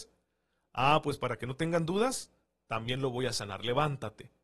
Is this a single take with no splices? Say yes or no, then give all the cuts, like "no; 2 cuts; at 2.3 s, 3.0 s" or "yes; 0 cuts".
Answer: yes; 0 cuts